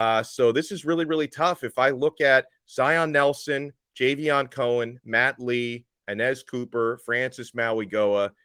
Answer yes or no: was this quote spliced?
no